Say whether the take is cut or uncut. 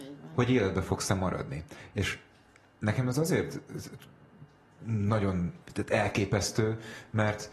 cut